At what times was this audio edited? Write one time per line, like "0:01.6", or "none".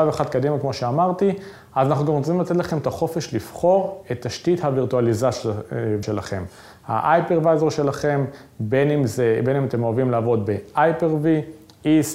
0:06.0